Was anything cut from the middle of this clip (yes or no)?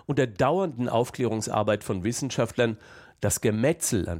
no